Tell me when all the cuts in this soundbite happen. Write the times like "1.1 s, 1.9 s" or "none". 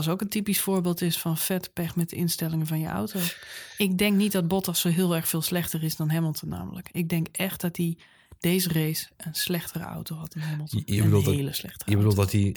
none